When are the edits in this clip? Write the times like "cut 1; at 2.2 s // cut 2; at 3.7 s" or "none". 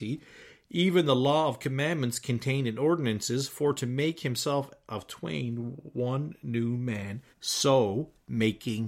cut 1; at 7.3 s

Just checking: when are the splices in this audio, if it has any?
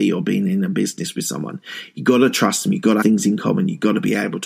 cut 1; at 3.0 s

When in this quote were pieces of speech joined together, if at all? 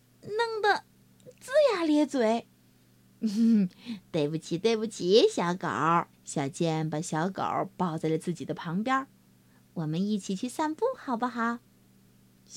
cut 1; at 6.1 s

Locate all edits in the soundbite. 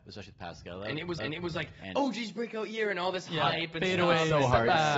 cut 1; at 1.2 s

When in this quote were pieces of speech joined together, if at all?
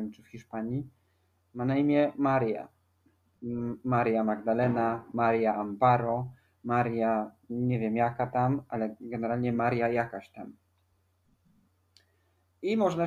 none

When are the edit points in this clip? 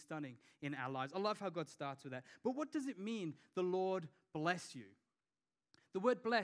none

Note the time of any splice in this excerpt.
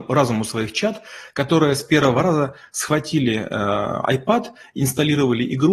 none

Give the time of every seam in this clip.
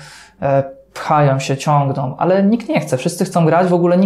none

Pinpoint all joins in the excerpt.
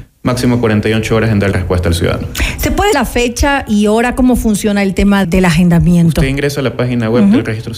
cut 1; at 1.5 s // cut 2; at 2.9 s // cut 3; at 5.2 s

